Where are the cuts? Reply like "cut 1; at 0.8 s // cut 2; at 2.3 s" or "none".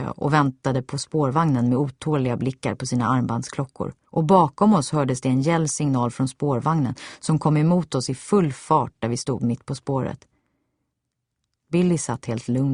cut 1; at 4.1 s

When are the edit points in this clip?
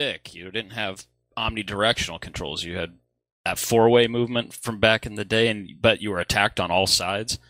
none

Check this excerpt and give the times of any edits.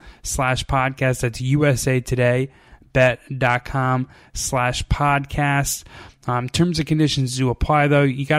none

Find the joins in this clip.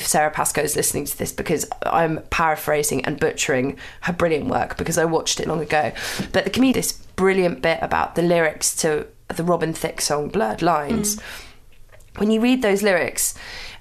cut 1; at 5.5 s // cut 2; at 6.7 s

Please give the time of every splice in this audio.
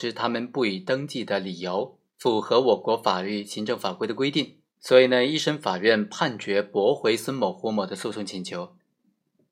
cut 1; at 2.1 s // cut 2; at 4.7 s

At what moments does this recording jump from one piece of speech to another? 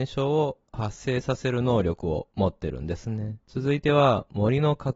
cut 1; at 2.3 s // cut 2; at 3.4 s

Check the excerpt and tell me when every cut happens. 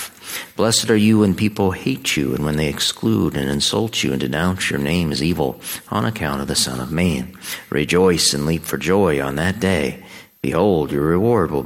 none

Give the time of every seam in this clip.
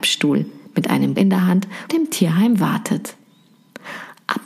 cut 1; at 1.2 s // cut 2; at 1.9 s

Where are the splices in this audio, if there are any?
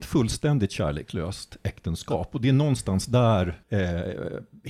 cut 1; at 3.6 s

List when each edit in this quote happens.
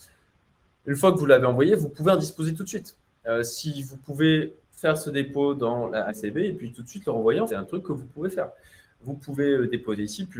cut 1; at 4.6 s // cut 2; at 6.1 s // cut 3; at 7.5 s

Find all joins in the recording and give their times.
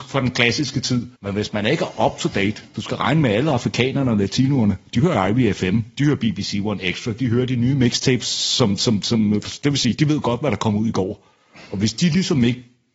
cut 1; at 1.2 s

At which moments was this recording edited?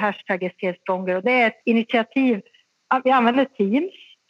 cut 1; at 1.6 s

